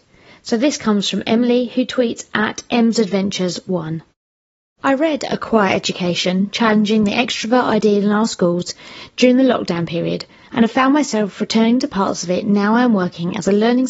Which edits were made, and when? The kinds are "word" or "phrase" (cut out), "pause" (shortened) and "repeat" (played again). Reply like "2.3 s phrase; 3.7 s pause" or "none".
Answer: none